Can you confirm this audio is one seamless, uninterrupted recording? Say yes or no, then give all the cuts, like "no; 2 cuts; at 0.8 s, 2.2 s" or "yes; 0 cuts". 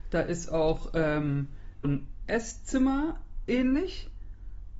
no; 1 cut; at 1.8 s